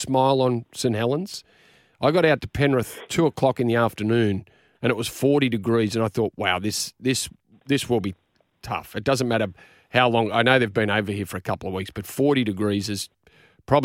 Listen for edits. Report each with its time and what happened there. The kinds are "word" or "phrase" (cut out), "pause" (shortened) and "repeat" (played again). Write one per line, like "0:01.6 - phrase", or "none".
none